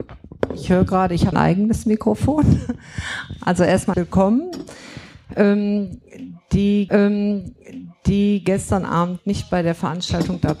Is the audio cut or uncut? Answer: cut